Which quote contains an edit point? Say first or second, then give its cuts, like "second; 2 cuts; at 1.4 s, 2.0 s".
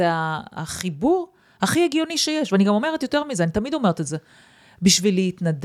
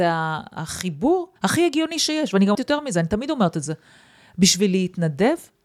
second; 2 cuts; at 1.4 s, 2.5 s